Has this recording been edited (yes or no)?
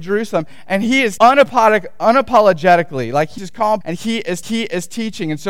yes